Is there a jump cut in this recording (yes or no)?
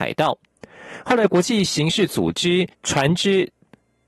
yes